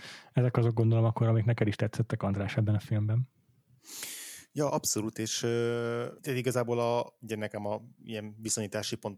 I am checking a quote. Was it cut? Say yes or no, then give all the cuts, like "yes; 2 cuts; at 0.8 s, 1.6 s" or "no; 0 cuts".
yes; 1 cut; at 6.2 s